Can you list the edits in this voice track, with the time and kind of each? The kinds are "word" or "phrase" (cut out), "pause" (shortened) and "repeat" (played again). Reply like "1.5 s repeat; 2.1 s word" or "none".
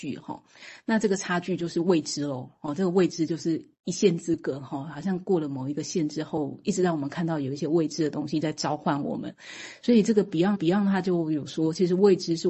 10.5 s repeat